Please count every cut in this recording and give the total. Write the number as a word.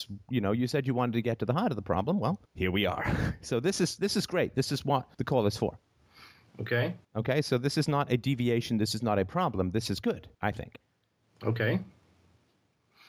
four